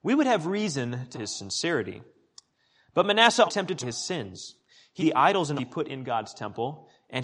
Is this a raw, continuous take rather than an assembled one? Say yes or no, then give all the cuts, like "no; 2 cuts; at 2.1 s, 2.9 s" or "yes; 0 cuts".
no; 5 cuts; at 1.1 s, 3.5 s, 3.8 s, 5.0 s, 5.6 s